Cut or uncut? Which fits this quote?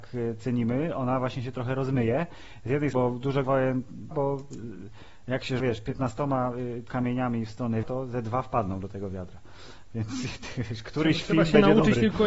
cut